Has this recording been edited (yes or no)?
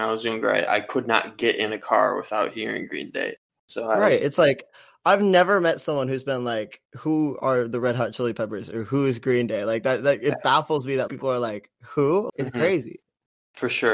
yes